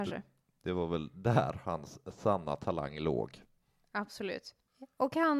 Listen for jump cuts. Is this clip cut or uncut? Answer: uncut